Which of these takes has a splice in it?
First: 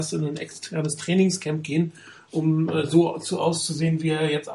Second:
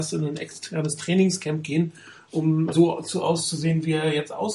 second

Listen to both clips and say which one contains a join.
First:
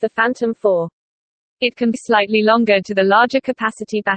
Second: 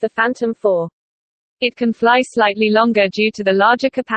first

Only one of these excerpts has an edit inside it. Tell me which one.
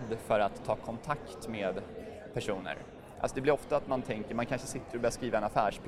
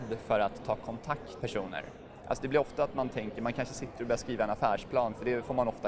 second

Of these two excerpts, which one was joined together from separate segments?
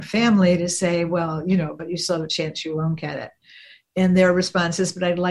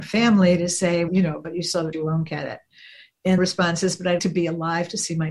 second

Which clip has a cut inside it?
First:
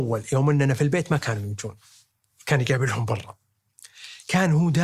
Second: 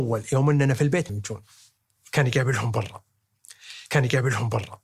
second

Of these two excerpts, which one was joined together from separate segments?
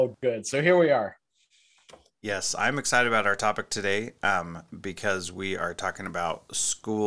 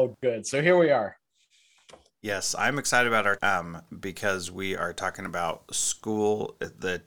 second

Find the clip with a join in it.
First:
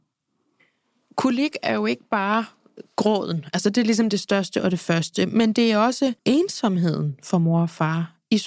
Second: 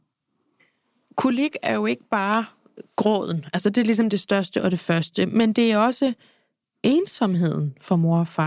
first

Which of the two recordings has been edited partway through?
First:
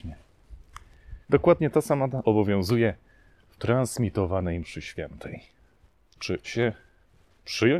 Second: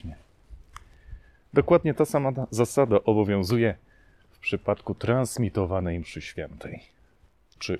first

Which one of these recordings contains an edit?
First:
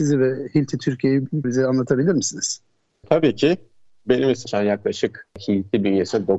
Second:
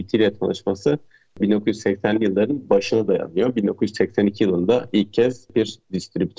first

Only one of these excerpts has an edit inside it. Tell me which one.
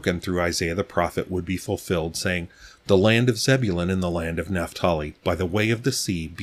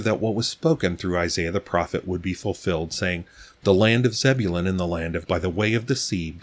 second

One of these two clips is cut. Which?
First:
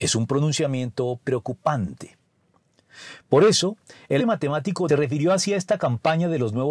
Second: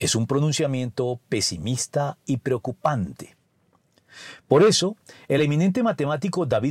first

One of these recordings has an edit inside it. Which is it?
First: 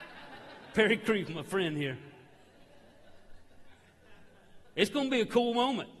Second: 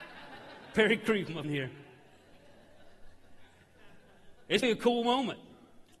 second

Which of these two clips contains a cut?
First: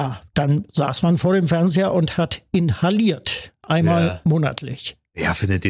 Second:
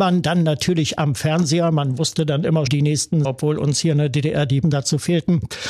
second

